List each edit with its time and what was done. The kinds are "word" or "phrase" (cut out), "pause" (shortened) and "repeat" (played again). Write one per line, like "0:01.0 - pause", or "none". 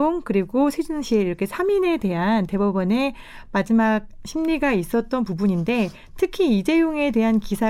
none

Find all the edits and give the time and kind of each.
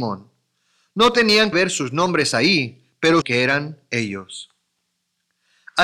0:01.5 - word
0:03.2 - word

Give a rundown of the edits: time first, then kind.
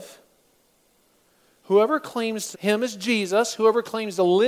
0:02.5 - phrase

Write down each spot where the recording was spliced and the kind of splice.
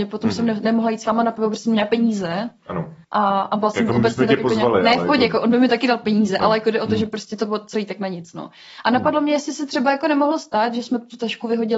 0:03.0 - pause

